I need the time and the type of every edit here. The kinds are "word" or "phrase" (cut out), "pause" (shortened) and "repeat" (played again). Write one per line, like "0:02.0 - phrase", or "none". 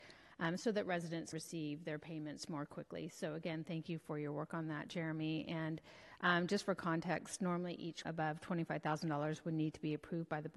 0:01.3 - word
0:08.0 - word